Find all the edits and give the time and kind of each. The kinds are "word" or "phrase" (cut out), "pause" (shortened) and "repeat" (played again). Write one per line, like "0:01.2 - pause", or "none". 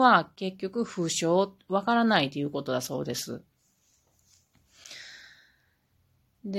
none